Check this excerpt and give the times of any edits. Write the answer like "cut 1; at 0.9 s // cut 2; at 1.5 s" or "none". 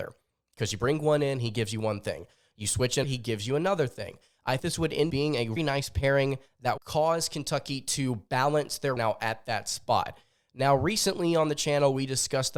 cut 1; at 3.0 s // cut 2; at 4.6 s // cut 3; at 5.1 s // cut 4; at 5.6 s // cut 5; at 6.8 s // cut 6; at 9.0 s